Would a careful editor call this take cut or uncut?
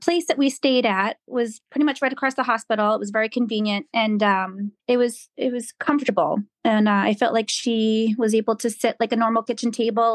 cut